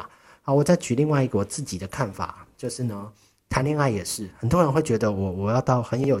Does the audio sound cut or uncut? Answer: uncut